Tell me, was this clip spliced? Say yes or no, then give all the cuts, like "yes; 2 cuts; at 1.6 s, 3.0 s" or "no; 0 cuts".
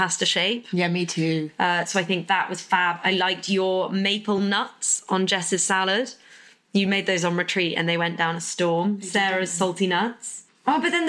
no; 0 cuts